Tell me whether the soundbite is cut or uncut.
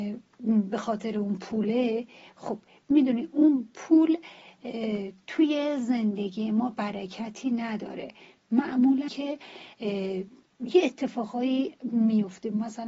cut